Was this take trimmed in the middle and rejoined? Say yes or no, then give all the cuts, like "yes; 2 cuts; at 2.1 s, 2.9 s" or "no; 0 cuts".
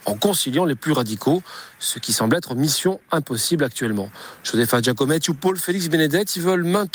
no; 0 cuts